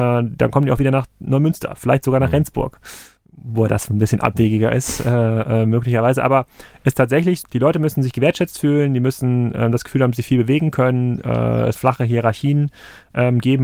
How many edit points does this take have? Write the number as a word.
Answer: two